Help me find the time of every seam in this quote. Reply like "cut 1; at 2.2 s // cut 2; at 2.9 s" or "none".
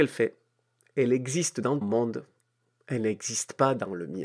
cut 1; at 1.8 s